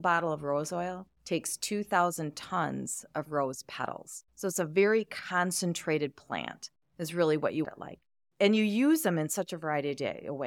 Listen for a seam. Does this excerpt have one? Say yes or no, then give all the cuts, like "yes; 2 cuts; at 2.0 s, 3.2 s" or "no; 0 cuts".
yes; 3 cuts; at 1.2 s, 4.3 s, 7.6 s